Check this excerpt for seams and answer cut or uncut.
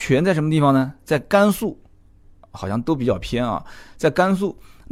uncut